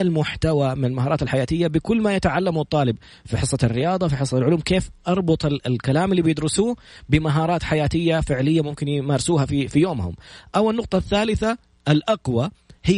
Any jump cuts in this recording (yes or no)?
no